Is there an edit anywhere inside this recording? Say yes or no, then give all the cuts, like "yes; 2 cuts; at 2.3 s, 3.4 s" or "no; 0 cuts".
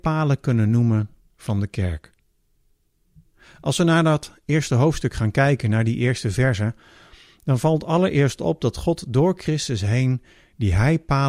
no; 0 cuts